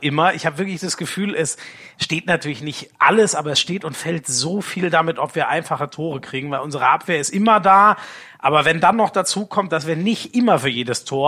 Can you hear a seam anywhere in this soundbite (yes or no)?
no